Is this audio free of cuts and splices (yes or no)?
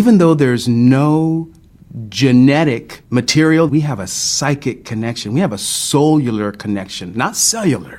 no